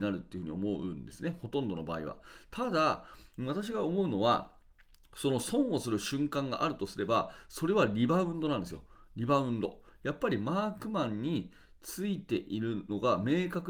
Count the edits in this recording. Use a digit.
0